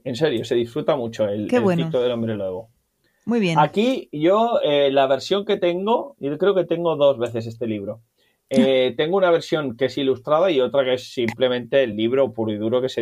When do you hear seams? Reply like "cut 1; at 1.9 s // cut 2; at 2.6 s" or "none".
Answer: none